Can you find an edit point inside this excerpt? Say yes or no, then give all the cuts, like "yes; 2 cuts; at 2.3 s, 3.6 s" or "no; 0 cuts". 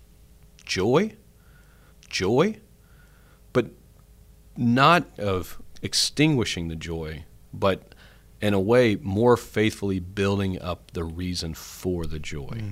yes; 2 cuts; at 1.9 s, 5.2 s